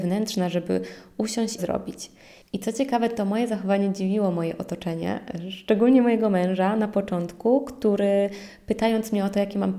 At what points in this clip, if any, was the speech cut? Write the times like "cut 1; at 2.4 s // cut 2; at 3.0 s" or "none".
cut 1; at 1.6 s